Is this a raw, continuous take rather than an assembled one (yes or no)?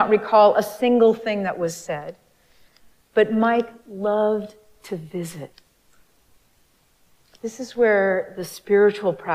yes